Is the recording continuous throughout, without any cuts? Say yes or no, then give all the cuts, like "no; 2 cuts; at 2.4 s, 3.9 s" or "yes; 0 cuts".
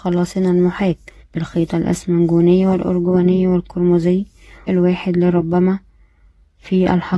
no; 2 cuts; at 1.2 s, 4.7 s